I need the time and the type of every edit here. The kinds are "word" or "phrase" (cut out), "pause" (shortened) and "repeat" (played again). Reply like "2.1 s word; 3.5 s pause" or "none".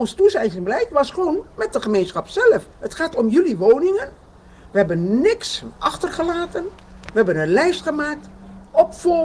2.7 s pause